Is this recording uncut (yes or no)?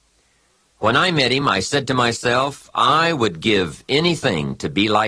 yes